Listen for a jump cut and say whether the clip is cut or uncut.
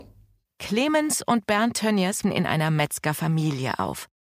cut